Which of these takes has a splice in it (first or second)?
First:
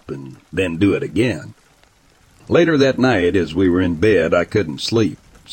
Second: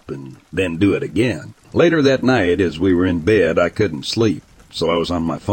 second